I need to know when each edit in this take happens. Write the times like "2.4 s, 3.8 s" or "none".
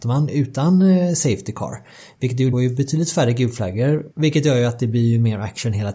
2.5 s, 4.1 s